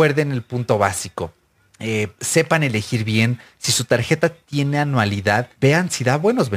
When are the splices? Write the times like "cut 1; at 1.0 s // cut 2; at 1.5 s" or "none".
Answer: cut 1; at 1.6 s // cut 2; at 5.5 s